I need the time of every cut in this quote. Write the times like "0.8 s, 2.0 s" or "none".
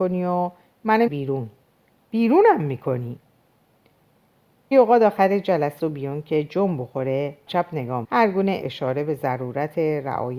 1.1 s, 4.7 s, 5.8 s, 7.5 s, 8.0 s, 8.6 s